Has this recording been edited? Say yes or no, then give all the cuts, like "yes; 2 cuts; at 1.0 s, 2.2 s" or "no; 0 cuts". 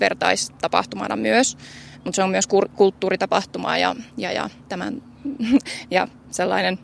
yes; 2 cuts; at 4.1 s, 4.6 s